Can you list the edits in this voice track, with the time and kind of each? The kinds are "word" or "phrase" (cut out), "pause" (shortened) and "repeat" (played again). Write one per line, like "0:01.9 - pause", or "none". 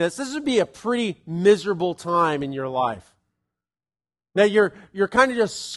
none